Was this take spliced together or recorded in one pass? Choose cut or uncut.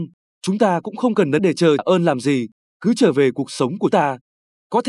cut